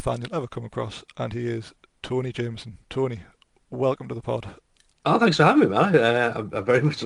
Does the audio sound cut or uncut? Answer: uncut